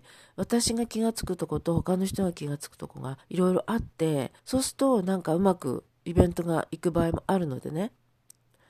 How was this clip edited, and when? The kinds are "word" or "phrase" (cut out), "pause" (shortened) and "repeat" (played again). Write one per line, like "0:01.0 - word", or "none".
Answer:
0:03.2 - pause
0:04.4 - pause